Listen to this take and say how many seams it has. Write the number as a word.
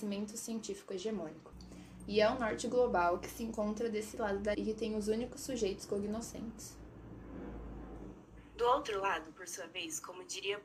one